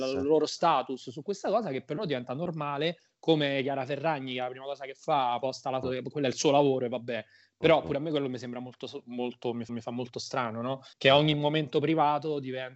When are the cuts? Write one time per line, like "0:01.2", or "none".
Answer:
0:05.8
0:09.7
0:10.9